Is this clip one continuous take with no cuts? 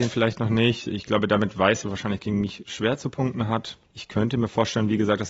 no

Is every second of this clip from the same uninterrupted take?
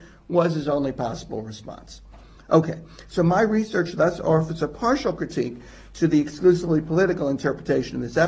yes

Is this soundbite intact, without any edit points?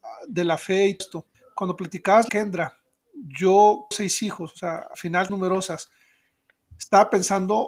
no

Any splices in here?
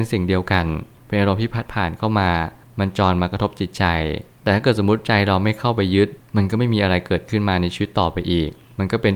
no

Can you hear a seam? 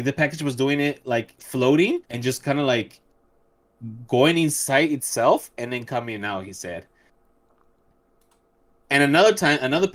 yes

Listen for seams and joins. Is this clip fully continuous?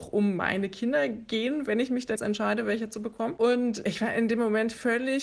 no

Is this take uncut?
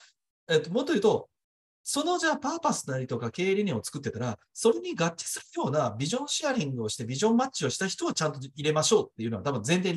yes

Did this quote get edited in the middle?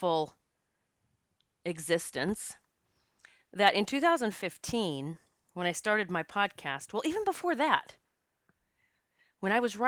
no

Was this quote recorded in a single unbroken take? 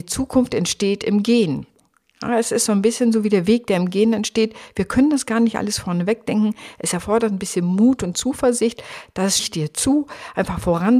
no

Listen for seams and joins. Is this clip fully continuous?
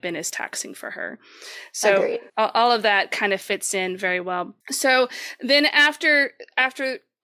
no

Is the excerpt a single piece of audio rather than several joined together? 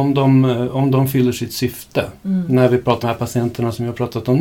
no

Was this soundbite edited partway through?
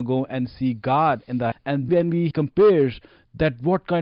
yes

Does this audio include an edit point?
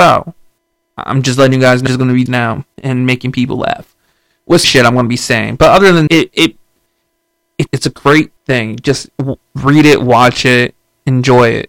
yes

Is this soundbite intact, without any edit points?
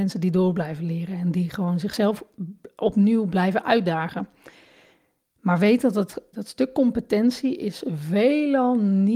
no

